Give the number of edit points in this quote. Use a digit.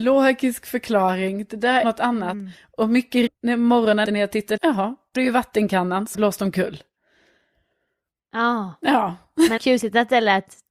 7